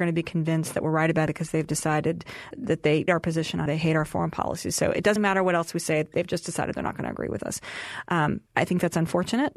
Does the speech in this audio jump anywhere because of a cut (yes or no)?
yes